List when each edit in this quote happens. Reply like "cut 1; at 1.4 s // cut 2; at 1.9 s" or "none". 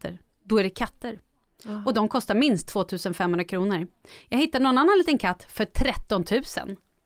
none